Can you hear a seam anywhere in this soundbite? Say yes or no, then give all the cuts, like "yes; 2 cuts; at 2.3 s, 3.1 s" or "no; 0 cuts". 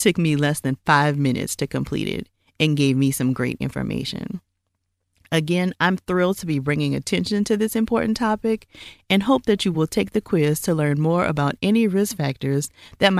no; 0 cuts